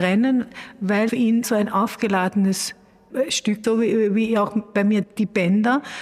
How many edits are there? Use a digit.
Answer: 5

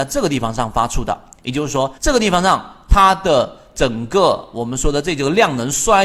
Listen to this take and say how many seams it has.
1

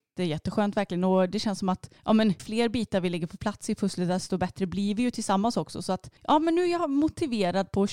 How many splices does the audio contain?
3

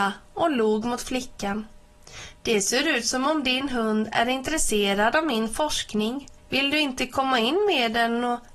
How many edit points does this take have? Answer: 1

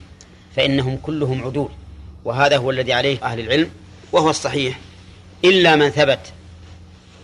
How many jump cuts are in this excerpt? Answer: 2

